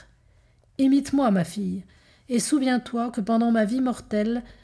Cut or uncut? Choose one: uncut